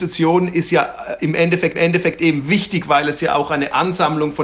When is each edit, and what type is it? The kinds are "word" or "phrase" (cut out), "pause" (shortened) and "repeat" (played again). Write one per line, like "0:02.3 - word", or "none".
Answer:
0:01.7 - repeat